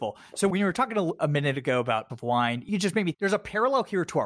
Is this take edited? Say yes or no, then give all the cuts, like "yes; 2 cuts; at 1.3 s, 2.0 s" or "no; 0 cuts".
yes; 2 cuts; at 2.1 s, 3.1 s